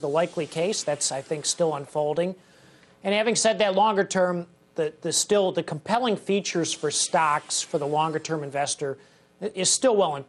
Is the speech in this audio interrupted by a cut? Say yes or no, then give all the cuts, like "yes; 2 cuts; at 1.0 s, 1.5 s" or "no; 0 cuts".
no; 0 cuts